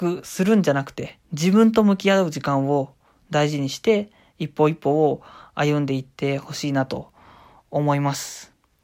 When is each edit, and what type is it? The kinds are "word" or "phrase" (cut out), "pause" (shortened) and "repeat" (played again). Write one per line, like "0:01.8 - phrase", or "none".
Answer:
0:01.2 - pause